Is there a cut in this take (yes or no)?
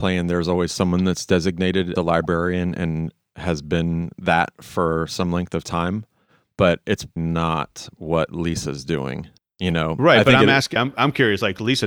yes